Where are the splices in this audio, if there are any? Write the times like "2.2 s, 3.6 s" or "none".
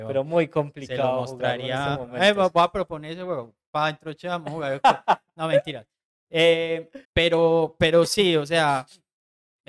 7.0 s